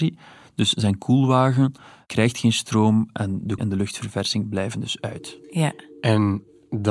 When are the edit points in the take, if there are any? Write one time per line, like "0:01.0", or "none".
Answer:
0:03.6